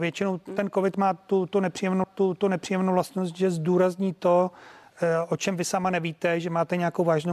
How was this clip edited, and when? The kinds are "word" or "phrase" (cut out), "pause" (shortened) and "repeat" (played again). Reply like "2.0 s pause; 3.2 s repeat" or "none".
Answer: 2.0 s repeat